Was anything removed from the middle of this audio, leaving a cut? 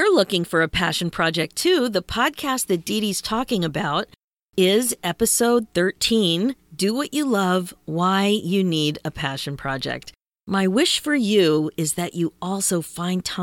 no; 0 cuts

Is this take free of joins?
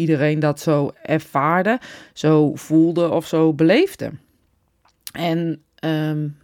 yes; 0 cuts

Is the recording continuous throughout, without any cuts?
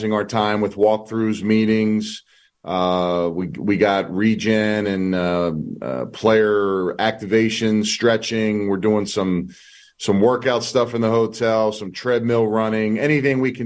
yes; 0 cuts

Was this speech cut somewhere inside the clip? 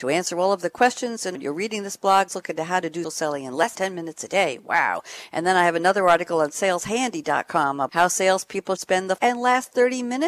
yes; 7 cuts; at 1.3 s, 2.3 s, 3.0 s, 3.7 s, 7.9 s, 8.8 s, 9.2 s

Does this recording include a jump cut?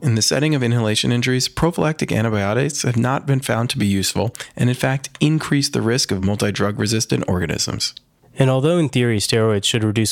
no; 0 cuts

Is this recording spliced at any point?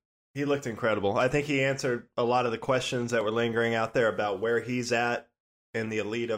no; 0 cuts

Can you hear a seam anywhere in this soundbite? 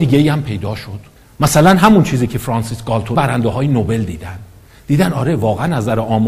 yes; 2 cuts; at 1.2 s, 3.1 s

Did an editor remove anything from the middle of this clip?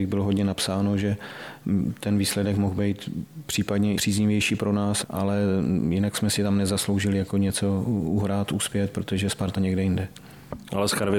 yes; 3 cuts; at 4.0 s, 5.0 s, 9.6 s

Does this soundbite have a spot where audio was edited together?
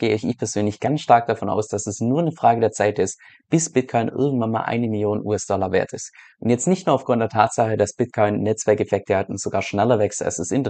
no; 0 cuts

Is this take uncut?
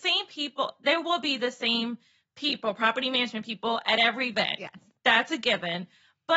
yes; 0 cuts

